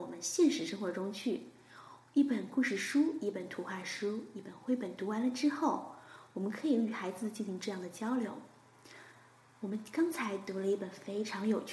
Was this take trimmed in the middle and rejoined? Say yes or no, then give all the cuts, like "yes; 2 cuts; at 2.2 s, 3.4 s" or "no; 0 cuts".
no; 0 cuts